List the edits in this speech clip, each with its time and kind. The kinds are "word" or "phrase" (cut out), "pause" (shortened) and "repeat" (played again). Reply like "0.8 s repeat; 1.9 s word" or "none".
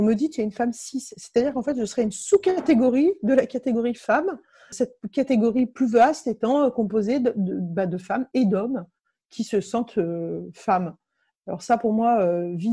none